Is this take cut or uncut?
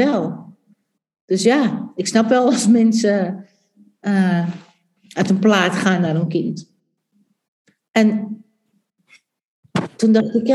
uncut